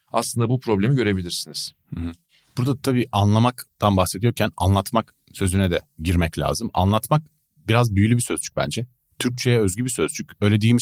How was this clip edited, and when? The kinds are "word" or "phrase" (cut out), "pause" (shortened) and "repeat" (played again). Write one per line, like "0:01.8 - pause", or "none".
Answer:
none